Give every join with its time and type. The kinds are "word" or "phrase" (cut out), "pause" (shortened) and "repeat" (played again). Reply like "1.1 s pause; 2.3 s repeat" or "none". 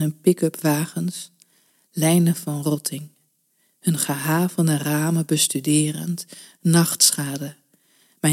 none